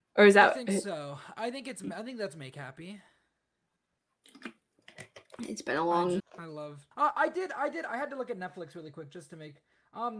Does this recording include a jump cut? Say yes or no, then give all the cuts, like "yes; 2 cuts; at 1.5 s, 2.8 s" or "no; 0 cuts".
yes; 2 cuts; at 6.2 s, 6.9 s